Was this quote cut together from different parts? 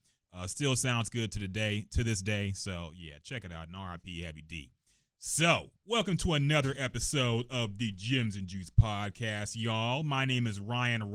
yes; 1 cut; at 5.8 s

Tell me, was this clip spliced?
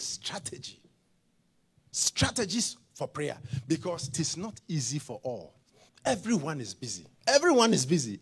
yes; 3 cuts; at 4.1 s, 5.9 s, 7.1 s

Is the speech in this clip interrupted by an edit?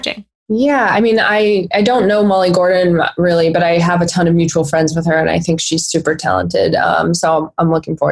no; 0 cuts

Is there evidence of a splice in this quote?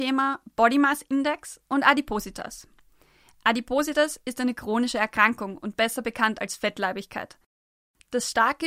no; 0 cuts

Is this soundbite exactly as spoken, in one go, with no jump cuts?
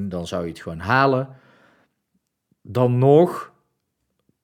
yes; 0 cuts

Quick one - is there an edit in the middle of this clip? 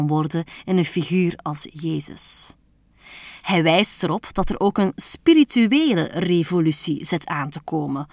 no; 0 cuts

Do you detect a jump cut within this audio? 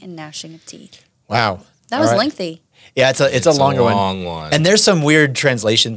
no; 0 cuts

